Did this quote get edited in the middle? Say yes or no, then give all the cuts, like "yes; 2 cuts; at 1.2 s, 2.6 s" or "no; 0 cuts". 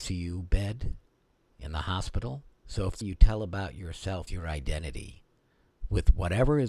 yes; 3 cuts; at 2.6 s, 3.0 s, 4.3 s